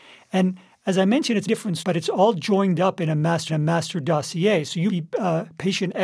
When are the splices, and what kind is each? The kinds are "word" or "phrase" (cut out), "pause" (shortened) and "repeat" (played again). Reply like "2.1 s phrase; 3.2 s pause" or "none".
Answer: 1.5 s word; 1.8 s word; 3.5 s repeat; 4.9 s word